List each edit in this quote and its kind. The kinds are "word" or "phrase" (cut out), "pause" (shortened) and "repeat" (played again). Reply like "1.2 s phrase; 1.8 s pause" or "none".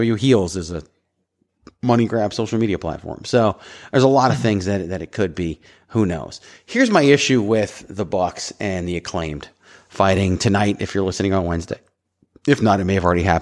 none

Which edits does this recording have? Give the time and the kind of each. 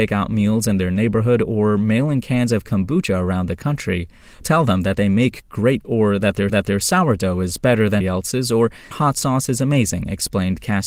4.4 s word; 5.8 s word; 6.5 s repeat; 8.0 s word; 8.9 s word

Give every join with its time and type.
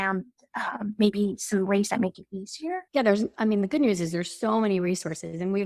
2.9 s pause

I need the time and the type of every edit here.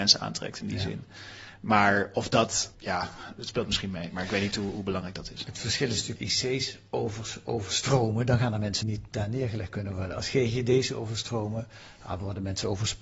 2.7 s pause; 6.2 s phrase; 8.8 s phrase

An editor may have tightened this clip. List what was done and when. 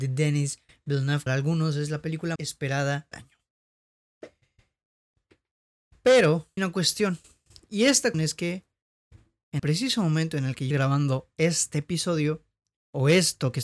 1.3 s word; 2.4 s word; 3.1 s word; 6.6 s word; 8.1 s word; 9.6 s word; 10.7 s word

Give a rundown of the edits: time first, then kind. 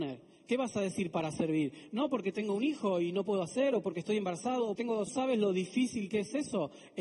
4.8 s word; 5.1 s phrase

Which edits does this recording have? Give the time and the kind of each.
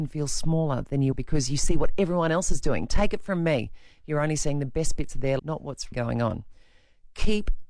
1.1 s word; 5.4 s word; 5.9 s word

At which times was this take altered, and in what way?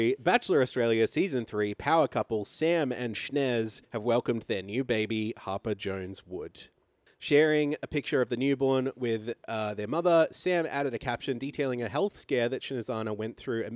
3.8 s pause; 7.1 s pause

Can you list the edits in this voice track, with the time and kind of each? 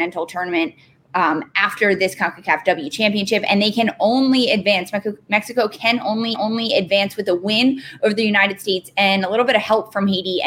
6.3 s repeat

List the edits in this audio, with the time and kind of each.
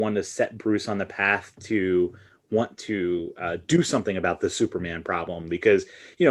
none

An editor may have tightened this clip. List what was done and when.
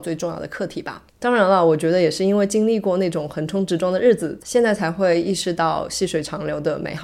1.1 s pause

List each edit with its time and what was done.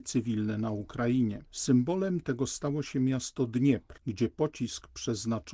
1.5 s pause

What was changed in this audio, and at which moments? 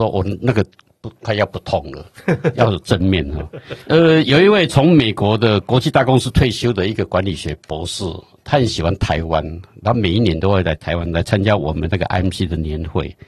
3.8 s pause

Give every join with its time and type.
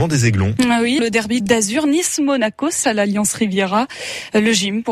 1.0 s word; 1.4 s phrase; 2.8 s word

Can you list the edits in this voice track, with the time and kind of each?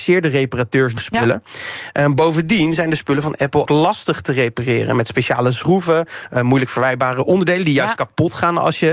1.0 s word; 3.7 s phrase

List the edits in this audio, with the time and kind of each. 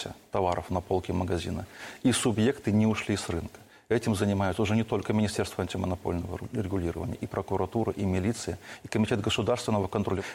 none

